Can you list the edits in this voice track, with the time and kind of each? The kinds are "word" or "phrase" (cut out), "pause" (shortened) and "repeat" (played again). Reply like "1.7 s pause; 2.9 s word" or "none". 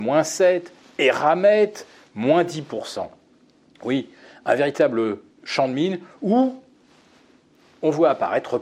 none

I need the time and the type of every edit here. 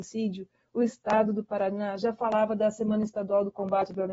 none

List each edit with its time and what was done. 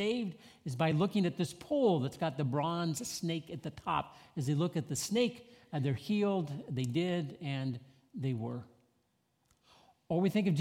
none

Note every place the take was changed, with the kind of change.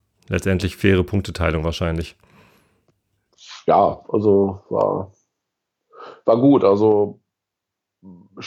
4.0 s pause

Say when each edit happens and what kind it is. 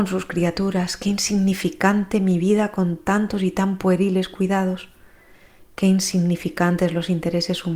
none

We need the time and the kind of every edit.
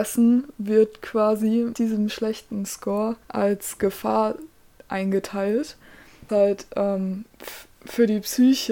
1.7 s word; 3.2 s pause; 6.3 s word

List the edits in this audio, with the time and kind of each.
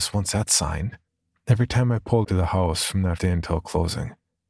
1.1 s pause; 2.2 s word; 3.2 s word

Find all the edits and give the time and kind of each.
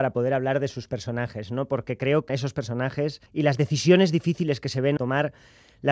2.3 s word; 3.3 s pause; 5.0 s phrase

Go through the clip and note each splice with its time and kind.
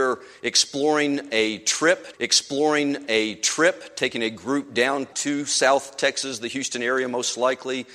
2.1 s repeat; 5.1 s word

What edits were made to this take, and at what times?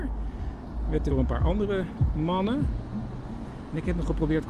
1.1 s phrase

